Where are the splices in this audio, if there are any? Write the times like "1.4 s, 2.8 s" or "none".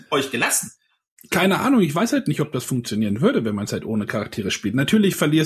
none

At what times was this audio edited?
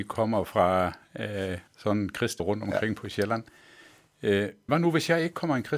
1.7 s, 2.4 s, 4.7 s

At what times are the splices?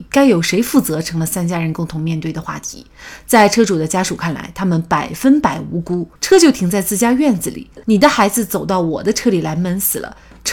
6.2 s, 7.8 s

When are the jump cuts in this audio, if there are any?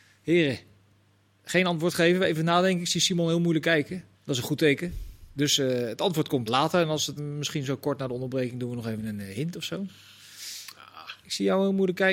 4.1 s, 6.5 s, 7.2 s

